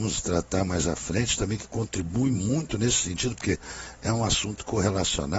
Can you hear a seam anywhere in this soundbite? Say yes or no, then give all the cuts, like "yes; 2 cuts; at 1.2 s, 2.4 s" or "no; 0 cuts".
no; 0 cuts